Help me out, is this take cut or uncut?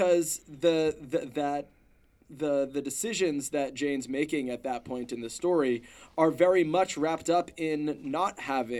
uncut